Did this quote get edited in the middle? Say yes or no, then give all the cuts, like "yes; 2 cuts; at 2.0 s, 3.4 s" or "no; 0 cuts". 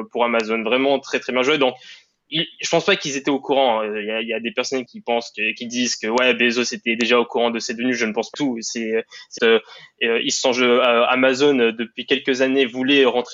yes; 3 cuts; at 4.9 s, 8.3 s, 9.4 s